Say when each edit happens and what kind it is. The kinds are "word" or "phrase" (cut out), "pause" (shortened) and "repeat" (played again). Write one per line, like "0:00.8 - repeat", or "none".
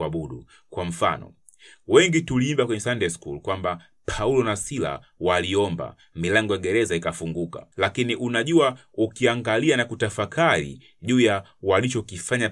0:07.7 - pause